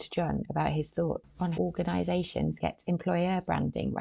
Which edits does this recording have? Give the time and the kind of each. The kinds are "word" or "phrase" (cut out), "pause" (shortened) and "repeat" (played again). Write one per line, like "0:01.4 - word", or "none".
0:01.5 - word
0:02.6 - word